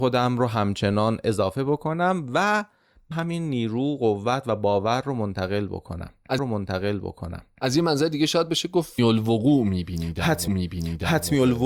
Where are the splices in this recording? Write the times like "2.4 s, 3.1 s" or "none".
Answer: 3.1 s, 6.4 s, 9.0 s, 10.5 s